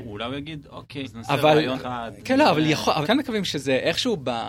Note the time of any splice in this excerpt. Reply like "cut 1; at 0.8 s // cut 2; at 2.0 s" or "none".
cut 1; at 1.0 s // cut 2; at 1.7 s // cut 3; at 3.0 s

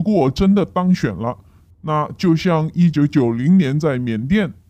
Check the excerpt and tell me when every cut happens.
none

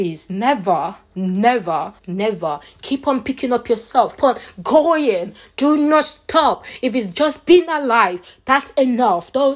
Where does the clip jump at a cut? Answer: cut 1; at 2.0 s // cut 2; at 4.2 s

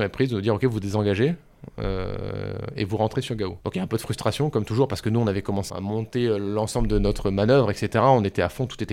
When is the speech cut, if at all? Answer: cut 1; at 3.6 s // cut 2; at 5.7 s

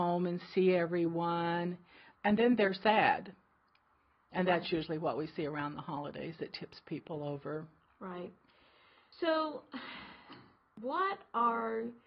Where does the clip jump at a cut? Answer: cut 1; at 2.1 s

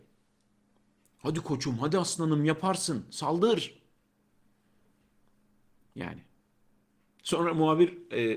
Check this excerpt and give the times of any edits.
none

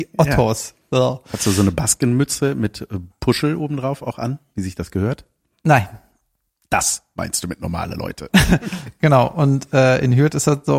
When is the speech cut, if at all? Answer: none

